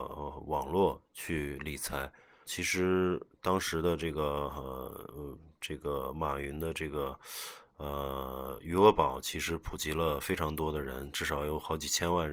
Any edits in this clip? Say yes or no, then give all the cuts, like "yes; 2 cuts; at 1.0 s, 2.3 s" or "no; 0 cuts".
yes; 1 cut; at 2.5 s